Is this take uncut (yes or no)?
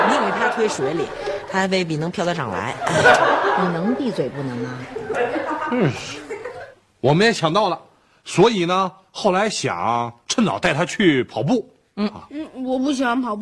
yes